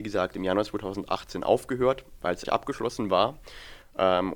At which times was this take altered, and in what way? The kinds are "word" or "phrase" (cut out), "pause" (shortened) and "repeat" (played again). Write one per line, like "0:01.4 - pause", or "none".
0:02.4 - word